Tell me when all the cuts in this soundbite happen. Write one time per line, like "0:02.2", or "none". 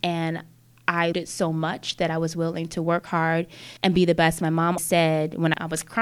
0:01.1
0:03.8
0:04.8